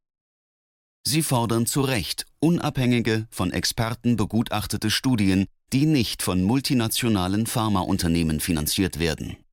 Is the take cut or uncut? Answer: uncut